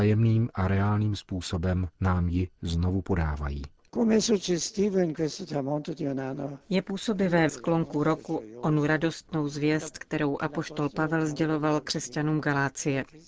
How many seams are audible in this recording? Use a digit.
2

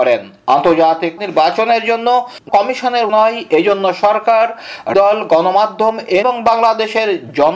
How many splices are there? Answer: 5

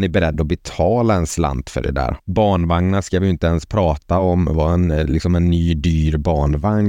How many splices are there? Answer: 1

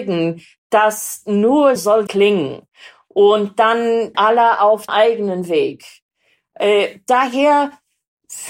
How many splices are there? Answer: 4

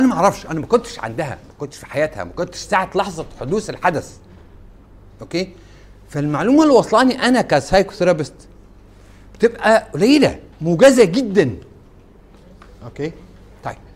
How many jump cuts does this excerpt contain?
1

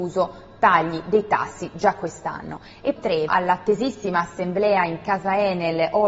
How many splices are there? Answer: 2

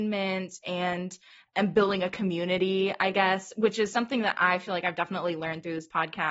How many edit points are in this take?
0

